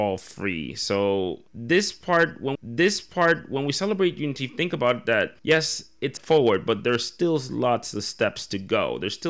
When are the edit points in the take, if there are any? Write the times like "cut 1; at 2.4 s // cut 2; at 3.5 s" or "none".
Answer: cut 1; at 2.5 s // cut 2; at 5.4 s // cut 3; at 6.2 s